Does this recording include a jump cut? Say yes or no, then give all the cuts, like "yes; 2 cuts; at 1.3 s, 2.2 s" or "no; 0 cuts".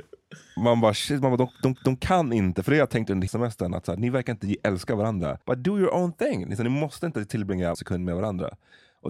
yes; 4 cuts; at 1.8 s, 3.3 s, 5.4 s, 7.7 s